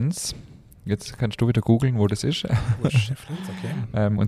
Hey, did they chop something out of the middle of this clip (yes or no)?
no